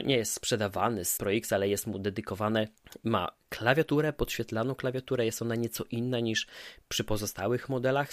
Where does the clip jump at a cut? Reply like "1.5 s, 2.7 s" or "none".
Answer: 1.2 s

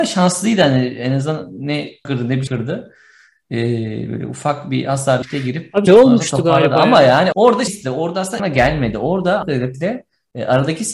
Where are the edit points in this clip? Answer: 2.0 s, 2.5 s, 5.2 s, 5.9 s, 7.3 s, 7.7 s, 8.4 s, 9.4 s, 9.7 s

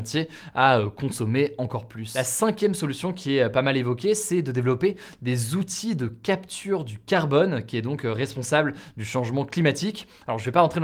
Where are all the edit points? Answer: none

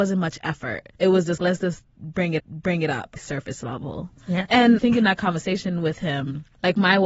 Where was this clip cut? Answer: 0.9 s, 1.4 s, 2.4 s, 3.2 s, 4.8 s

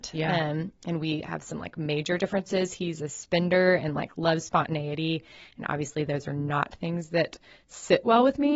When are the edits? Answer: none

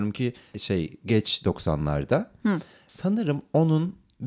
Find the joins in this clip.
none

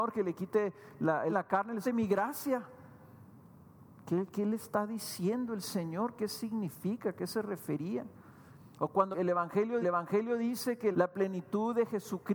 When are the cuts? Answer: 1.3 s, 1.8 s, 8.7 s, 9.1 s, 9.8 s, 10.9 s

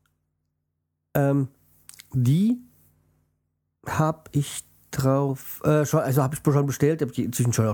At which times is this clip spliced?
none

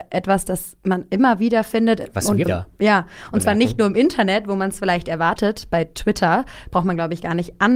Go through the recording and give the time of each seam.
2.5 s

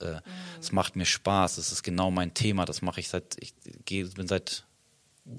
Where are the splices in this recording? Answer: none

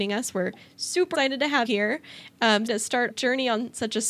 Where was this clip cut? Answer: 1.1 s, 1.7 s, 2.7 s, 3.1 s

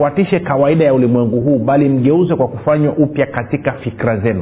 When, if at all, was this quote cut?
none

